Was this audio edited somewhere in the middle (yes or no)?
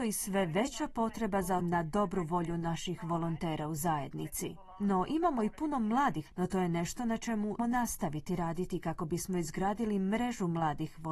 yes